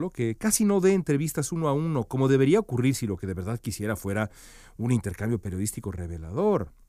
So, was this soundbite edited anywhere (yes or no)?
no